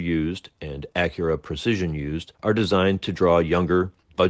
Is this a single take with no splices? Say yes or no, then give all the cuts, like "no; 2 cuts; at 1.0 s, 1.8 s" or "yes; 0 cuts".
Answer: no; 1 cut; at 2.4 s